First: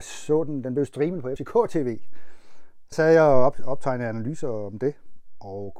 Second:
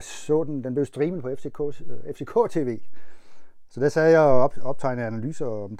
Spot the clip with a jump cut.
first; 2 cuts; at 1.4 s, 2.9 s

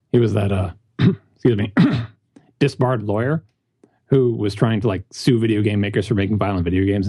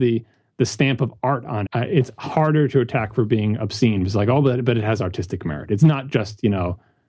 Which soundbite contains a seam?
second; 1 cut; at 1.7 s

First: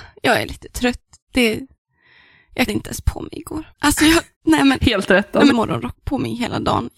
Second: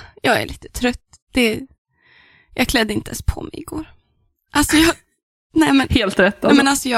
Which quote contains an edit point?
first; 4 cuts; at 2.7 s, 3.7 s, 4.3 s, 5.5 s

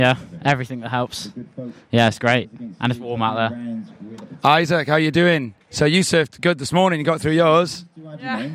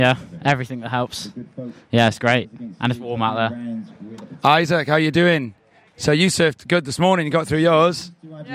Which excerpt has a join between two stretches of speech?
first; 1 cut; at 5.6 s

